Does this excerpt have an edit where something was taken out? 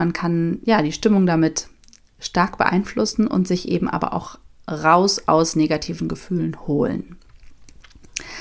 no; 0 cuts

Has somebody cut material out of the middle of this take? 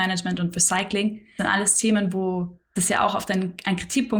yes; 2 cuts; at 1.4 s, 2.8 s

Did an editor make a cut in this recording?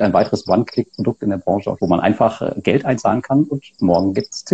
yes; 1 cut; at 1.8 s

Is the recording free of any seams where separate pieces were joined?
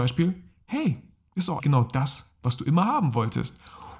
no; 1 cut; at 1.6 s

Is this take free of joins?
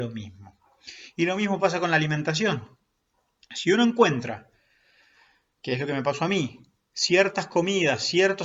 yes; 0 cuts

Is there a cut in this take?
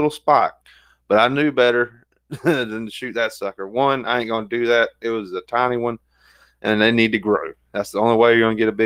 no; 0 cuts

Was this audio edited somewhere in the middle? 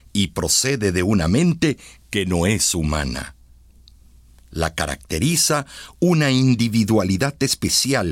no; 0 cuts

